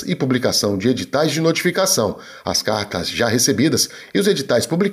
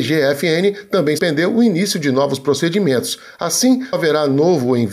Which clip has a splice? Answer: second; 2 cuts; at 1.2 s, 3.9 s

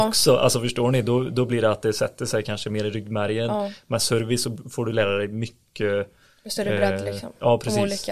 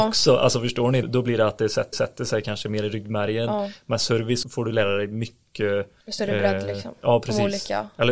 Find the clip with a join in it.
second; 4 cuts; at 1.0 s, 1.9 s, 4.4 s, 6.0 s

